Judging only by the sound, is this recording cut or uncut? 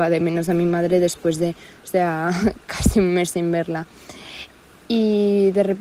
uncut